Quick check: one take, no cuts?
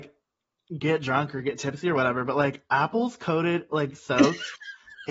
yes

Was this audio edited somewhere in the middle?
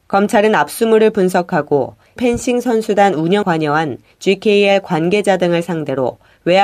yes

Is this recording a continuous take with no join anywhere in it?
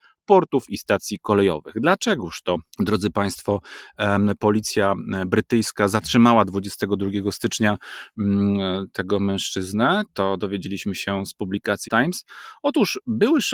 no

